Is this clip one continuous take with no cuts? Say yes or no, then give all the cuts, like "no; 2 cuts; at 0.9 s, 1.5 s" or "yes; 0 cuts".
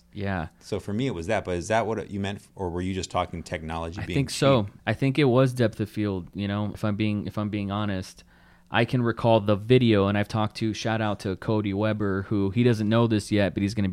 no; 2 cuts; at 4.8 s, 6.7 s